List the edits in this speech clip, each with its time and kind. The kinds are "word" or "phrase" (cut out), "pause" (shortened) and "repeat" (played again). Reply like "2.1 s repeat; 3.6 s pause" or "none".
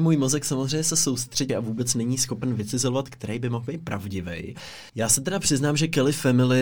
1.5 s phrase; 4.9 s pause